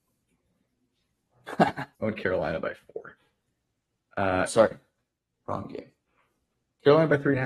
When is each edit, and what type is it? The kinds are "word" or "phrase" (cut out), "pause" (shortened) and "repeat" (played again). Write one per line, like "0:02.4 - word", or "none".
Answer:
0:01.9 - pause
0:04.5 - word